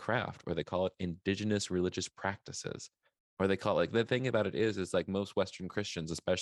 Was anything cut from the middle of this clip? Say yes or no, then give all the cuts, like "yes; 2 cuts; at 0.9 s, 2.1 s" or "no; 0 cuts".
no; 0 cuts